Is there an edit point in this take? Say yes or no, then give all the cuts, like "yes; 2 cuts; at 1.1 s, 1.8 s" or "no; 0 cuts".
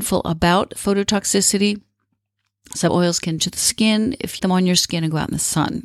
yes; 3 cuts; at 2.9 s, 3.4 s, 4.4 s